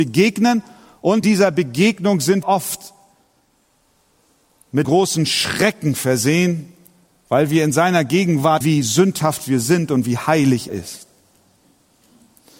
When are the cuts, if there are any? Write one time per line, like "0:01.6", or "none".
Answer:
0:01.2
0:02.4
0:04.8
0:08.6
0:10.7